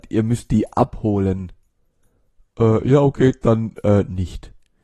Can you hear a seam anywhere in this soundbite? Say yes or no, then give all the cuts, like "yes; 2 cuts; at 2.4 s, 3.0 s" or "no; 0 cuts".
no; 0 cuts